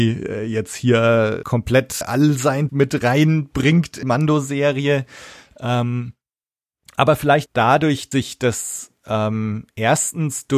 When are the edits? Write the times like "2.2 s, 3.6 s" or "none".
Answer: 1.4 s, 2.0 s, 2.7 s, 4.0 s, 7.5 s, 8.1 s